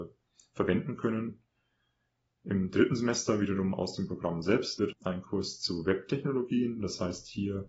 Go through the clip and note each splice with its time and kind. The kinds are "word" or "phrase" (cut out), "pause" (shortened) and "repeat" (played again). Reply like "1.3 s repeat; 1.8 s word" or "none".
4.9 s word